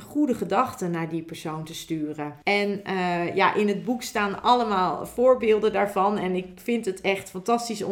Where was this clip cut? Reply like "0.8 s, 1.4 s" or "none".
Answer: 2.4 s